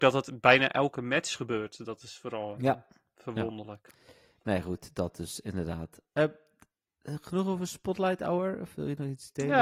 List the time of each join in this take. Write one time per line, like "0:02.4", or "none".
none